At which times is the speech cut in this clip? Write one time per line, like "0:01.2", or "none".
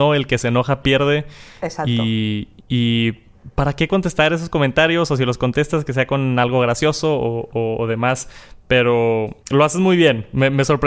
0:02.6
0:09.4